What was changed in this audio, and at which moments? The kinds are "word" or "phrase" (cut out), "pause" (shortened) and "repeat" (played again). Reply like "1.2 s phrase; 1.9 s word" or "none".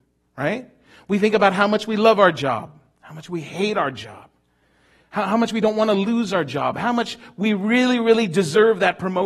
none